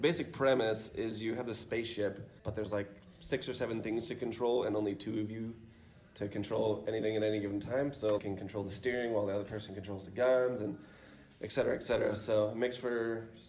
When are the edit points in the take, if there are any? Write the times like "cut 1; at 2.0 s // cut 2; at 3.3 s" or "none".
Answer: cut 1; at 2.4 s // cut 2; at 8.2 s